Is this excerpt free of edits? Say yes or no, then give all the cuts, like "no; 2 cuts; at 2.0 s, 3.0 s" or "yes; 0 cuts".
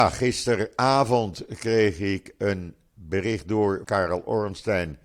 no; 1 cut; at 3.8 s